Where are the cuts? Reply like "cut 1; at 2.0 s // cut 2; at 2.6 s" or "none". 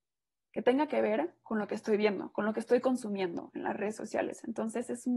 none